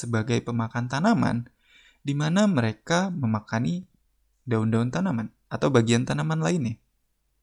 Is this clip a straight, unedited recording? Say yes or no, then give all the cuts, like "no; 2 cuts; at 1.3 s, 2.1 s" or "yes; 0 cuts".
yes; 0 cuts